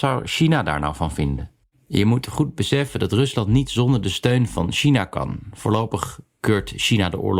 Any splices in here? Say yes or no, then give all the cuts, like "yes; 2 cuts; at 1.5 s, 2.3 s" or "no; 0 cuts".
no; 0 cuts